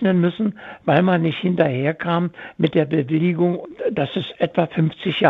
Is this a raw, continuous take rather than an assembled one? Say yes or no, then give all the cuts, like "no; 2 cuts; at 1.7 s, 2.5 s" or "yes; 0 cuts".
yes; 0 cuts